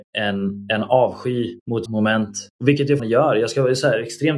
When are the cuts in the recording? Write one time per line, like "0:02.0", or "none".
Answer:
0:01.9
0:03.0